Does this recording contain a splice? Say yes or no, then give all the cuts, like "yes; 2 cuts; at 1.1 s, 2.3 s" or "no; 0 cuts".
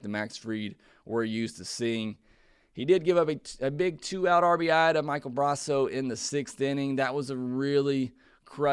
no; 0 cuts